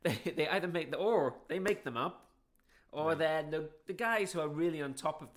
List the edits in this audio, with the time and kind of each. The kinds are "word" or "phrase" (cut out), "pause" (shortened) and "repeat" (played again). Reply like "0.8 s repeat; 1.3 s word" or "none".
none